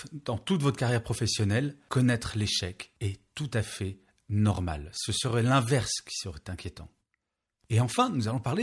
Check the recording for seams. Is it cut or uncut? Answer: uncut